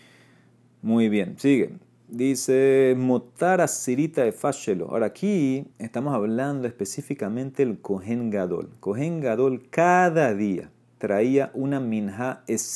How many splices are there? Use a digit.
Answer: 1